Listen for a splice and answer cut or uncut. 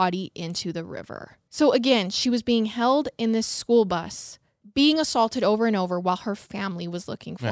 cut